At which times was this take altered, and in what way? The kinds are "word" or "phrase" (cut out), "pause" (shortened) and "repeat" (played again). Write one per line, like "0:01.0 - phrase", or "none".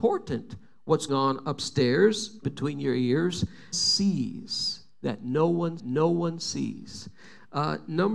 0:01.1 - word
0:02.4 - word
0:03.7 - phrase
0:05.8 - repeat